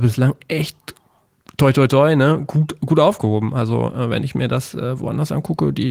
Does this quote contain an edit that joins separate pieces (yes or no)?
no